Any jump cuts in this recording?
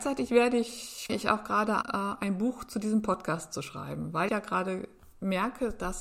yes; 3 cuts; at 1.1 s, 1.8 s, 4.3 s

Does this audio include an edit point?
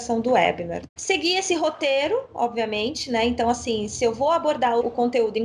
no; 0 cuts

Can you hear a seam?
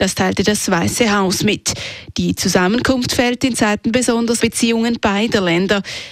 yes; 1 cut; at 4.4 s

